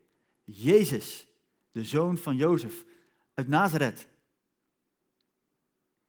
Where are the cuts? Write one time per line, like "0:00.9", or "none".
none